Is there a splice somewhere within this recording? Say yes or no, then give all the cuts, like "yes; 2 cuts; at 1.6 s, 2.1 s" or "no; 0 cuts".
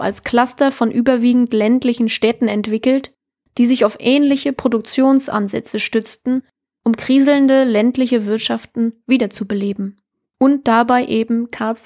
no; 0 cuts